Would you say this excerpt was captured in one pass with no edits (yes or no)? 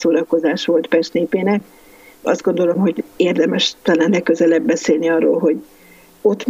yes